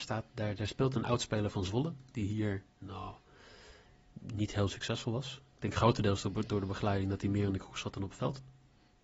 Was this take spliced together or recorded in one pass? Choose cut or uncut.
uncut